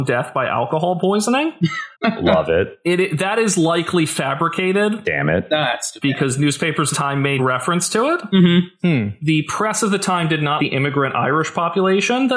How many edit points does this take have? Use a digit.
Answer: 4